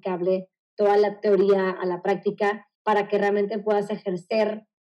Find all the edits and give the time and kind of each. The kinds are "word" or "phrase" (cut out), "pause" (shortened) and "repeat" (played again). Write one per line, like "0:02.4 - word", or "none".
0:02.8 - pause